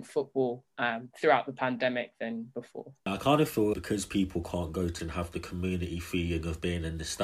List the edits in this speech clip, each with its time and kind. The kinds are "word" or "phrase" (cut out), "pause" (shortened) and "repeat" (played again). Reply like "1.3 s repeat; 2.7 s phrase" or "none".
3.7 s word; 5.0 s word